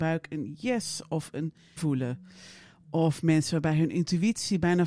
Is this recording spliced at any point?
yes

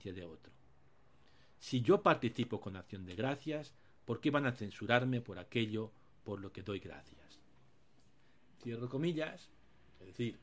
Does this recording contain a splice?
no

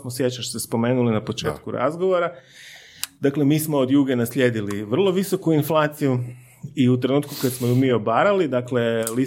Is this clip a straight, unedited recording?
yes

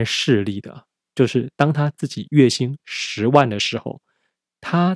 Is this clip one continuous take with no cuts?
yes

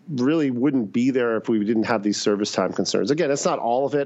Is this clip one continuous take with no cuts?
yes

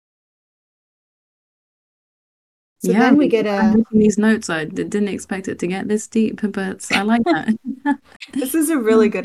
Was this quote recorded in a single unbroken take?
yes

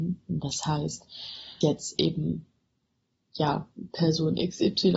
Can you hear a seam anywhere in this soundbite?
yes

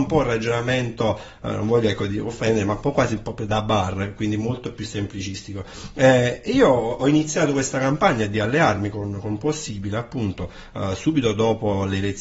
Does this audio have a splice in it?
no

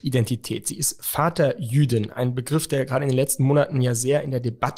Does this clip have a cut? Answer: no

